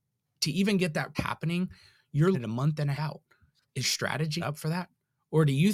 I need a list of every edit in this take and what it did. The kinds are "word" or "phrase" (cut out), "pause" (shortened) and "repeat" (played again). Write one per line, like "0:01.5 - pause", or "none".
0:01.1 - word
0:02.3 - word
0:03.0 - word
0:03.8 - word
0:04.4 - word